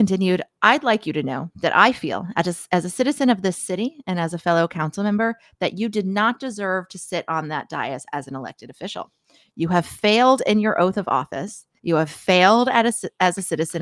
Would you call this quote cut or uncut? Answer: cut